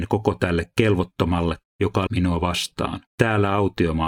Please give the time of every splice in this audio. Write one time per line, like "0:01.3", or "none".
0:01.6
0:02.1
0:03.1